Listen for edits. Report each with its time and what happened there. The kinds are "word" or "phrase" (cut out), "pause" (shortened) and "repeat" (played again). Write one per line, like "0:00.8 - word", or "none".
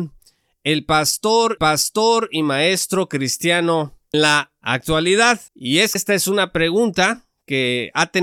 0:01.6 - repeat
0:04.1 - word
0:05.5 - pause
0:06.0 - word